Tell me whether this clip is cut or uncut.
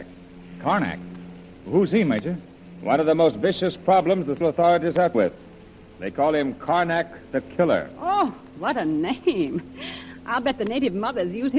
cut